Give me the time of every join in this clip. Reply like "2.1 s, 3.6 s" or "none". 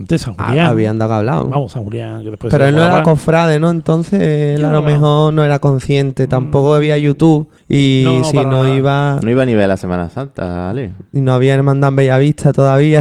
1.7 s, 7.6 s, 9.2 s